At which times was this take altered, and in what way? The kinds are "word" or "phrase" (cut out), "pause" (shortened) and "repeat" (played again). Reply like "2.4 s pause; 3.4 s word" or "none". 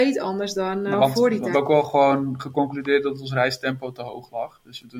0.9 s word; 1.5 s word